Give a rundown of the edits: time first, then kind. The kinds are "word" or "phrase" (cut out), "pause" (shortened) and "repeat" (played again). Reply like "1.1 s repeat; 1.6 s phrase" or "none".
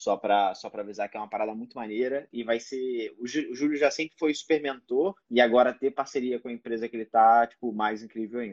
5.2 s pause